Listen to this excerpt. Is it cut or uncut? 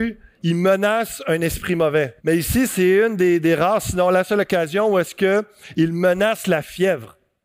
cut